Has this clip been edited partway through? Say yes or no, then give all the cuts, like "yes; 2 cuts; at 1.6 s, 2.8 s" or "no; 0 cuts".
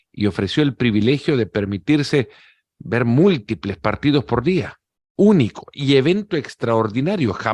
no; 0 cuts